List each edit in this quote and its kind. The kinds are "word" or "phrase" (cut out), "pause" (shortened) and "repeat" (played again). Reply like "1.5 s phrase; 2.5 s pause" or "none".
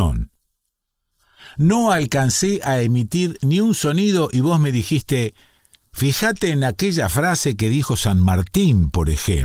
none